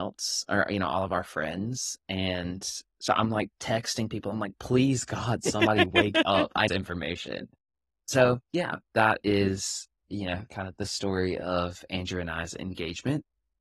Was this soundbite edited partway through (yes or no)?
yes